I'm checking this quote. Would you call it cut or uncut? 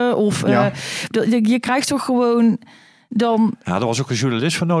uncut